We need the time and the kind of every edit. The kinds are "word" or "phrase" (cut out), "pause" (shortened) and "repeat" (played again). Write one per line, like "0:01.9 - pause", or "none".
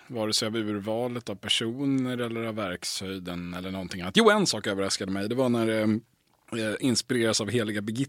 none